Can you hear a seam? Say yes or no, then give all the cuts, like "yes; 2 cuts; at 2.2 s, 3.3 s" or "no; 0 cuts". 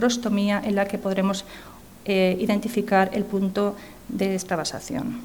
no; 0 cuts